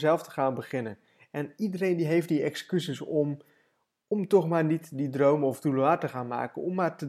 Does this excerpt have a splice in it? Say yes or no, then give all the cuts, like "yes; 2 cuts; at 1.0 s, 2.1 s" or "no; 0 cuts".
no; 0 cuts